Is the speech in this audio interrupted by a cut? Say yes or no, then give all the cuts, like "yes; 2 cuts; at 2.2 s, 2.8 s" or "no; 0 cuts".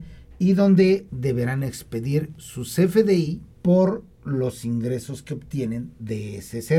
yes; 2 cuts; at 1.1 s, 3.5 s